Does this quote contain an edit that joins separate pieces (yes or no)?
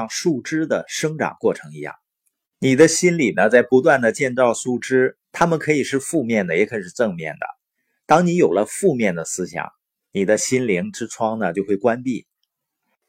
yes